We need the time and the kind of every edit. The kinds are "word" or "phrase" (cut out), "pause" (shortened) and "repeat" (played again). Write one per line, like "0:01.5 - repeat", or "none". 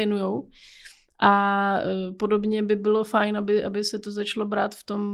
none